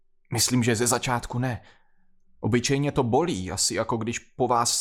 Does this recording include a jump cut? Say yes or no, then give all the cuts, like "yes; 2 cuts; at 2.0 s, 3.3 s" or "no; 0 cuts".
no; 0 cuts